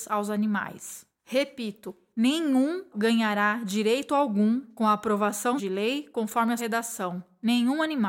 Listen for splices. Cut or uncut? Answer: cut